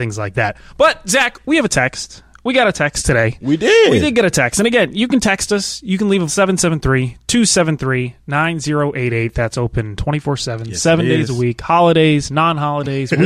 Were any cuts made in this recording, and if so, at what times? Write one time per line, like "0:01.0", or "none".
0:06.3